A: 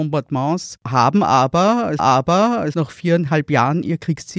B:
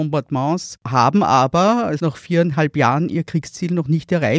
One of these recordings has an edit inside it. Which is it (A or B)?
A